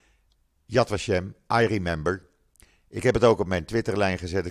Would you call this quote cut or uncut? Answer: uncut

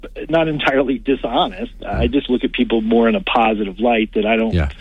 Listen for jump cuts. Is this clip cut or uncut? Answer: uncut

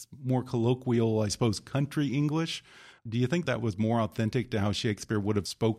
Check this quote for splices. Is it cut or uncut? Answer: cut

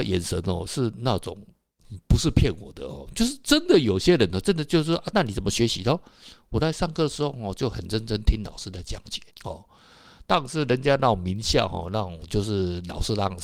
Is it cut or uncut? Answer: cut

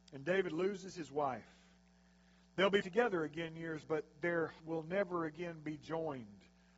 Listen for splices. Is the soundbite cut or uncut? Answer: cut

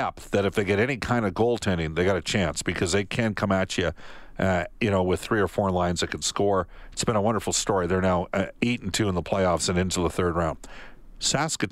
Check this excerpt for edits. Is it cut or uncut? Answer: uncut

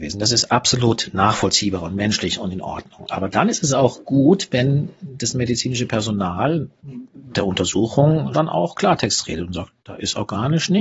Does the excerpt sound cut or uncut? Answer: cut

